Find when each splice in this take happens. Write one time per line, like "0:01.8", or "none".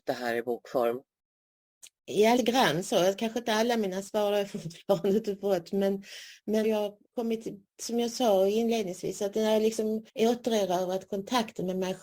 0:02.4
0:06.6
0:07.0
0:10.1